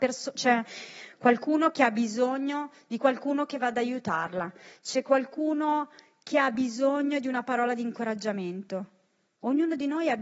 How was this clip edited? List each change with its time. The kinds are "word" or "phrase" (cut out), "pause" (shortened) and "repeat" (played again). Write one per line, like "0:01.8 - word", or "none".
none